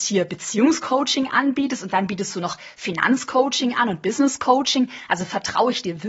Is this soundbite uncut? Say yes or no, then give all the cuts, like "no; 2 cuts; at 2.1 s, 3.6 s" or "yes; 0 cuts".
yes; 0 cuts